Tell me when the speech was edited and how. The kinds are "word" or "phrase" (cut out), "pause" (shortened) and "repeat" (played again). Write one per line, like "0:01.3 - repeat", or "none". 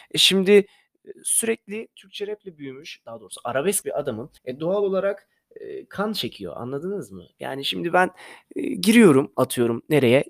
0:03.8 - phrase
0:04.4 - pause